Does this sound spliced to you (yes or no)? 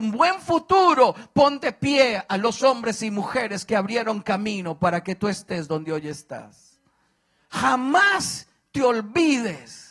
no